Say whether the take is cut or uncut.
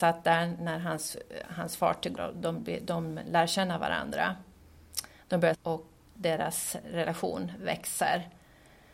cut